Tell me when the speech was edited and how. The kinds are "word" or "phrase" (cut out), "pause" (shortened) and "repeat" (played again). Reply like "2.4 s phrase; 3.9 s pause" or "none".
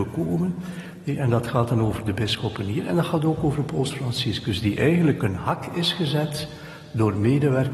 none